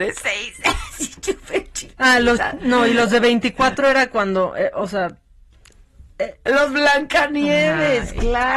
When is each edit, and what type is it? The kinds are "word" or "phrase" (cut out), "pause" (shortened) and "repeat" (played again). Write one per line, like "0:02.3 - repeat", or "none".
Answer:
0:06.1 - pause